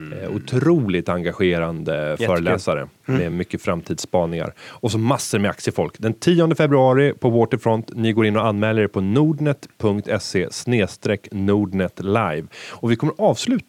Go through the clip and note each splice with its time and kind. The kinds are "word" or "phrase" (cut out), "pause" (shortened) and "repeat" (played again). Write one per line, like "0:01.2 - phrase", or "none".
none